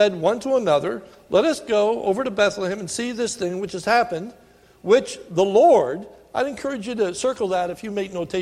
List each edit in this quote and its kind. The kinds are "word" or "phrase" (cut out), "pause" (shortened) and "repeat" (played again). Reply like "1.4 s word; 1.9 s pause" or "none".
none